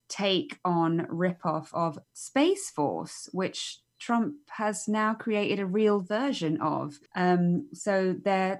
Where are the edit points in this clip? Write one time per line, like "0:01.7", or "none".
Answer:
0:02.0
0:07.1